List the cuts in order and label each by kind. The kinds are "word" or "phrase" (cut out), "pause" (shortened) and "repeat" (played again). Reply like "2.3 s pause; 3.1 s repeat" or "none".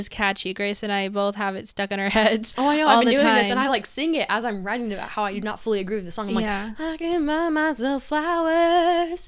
none